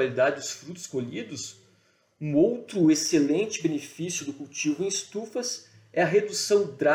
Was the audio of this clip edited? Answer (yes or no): no